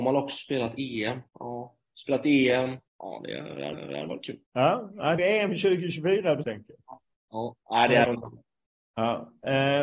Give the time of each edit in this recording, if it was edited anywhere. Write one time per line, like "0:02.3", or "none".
0:01.3
0:02.9
0:03.7
0:04.5
0:05.2
0:06.4
0:07.6
0:08.0